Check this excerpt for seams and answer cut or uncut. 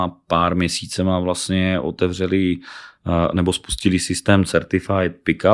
uncut